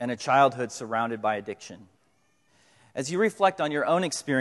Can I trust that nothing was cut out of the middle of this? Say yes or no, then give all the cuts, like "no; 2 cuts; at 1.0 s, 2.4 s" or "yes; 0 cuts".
no; 1 cut; at 2.5 s